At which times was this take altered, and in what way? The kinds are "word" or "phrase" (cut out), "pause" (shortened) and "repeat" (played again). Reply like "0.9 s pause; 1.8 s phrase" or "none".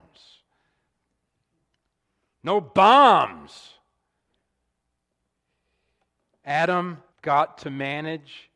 7.1 s pause